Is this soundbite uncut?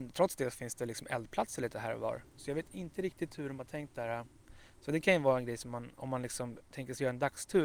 yes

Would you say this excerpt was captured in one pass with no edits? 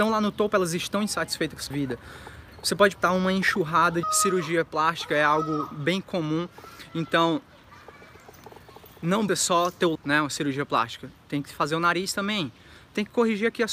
no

